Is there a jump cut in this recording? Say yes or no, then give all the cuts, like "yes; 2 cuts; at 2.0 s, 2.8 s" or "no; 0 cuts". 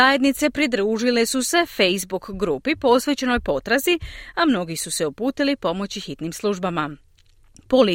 no; 0 cuts